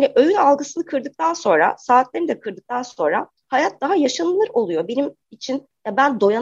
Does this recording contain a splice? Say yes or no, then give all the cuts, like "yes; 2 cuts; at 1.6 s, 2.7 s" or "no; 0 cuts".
yes; 1 cut; at 5.2 s